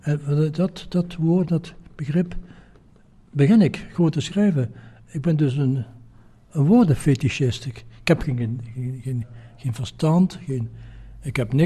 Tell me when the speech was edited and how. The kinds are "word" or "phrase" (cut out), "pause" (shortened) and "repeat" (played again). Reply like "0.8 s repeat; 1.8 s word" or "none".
none